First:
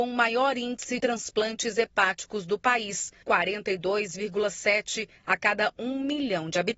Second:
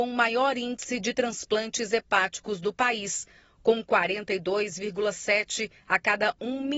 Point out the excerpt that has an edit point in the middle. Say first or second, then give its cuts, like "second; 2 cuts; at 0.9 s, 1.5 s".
first; 2 cuts; at 1.0 s, 3.2 s